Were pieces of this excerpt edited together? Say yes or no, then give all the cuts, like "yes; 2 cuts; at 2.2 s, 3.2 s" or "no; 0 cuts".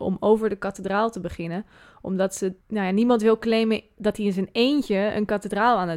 yes; 1 cut; at 2.6 s